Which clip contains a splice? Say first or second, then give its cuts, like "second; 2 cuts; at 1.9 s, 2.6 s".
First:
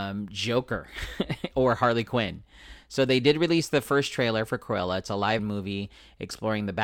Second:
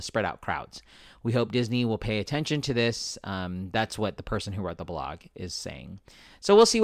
first; 1 cut; at 5.4 s